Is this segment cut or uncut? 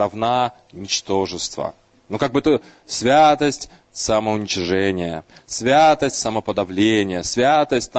uncut